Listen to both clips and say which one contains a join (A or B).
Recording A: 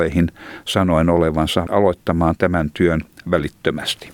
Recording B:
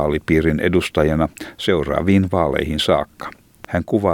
A